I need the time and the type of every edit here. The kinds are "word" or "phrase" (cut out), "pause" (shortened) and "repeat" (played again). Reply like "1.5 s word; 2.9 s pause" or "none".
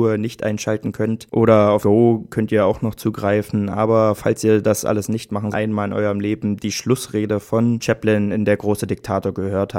1.8 s word; 5.5 s phrase; 7.8 s word